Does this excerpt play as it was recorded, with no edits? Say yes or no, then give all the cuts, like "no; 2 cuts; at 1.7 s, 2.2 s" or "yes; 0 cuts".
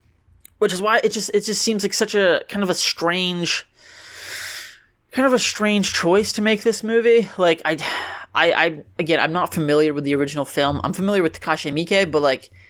yes; 0 cuts